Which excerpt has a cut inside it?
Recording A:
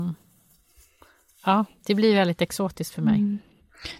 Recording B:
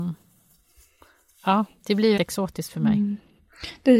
B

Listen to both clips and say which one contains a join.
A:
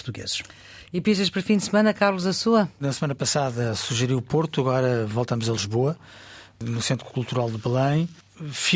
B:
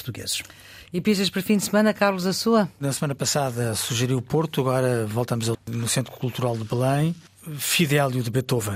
B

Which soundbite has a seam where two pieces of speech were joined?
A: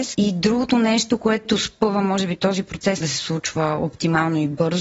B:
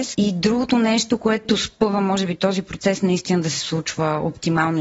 A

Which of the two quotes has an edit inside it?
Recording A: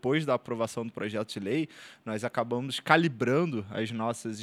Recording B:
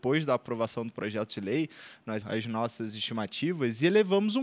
B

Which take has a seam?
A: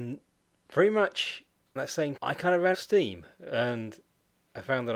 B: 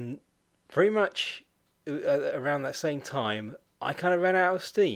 A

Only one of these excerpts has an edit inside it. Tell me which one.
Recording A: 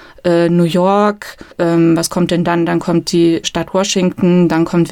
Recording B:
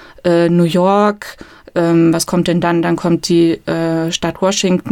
A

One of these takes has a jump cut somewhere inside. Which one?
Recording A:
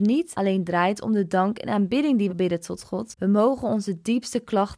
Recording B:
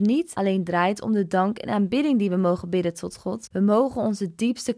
A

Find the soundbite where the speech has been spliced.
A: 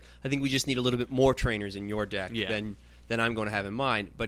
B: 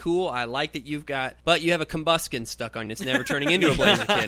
B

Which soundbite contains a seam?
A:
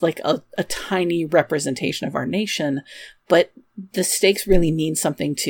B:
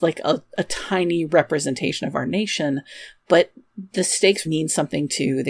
B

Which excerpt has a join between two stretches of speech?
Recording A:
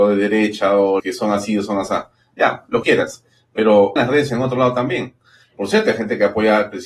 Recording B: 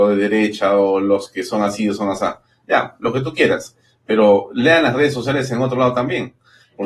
A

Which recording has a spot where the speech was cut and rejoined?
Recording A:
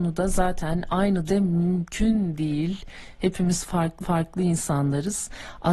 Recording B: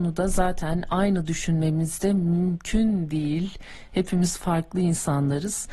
A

